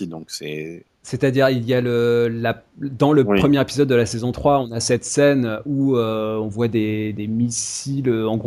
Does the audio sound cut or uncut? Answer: uncut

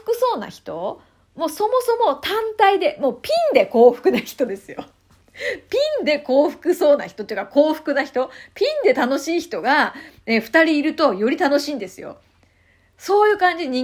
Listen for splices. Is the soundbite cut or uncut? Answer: uncut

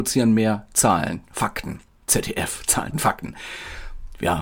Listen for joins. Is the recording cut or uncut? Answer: cut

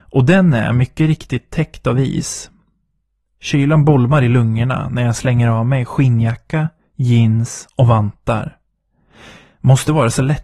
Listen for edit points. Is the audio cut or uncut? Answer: uncut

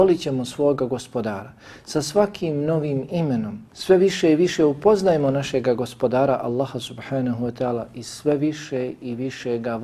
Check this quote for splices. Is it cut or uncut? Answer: cut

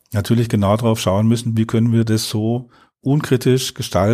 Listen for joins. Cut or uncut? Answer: uncut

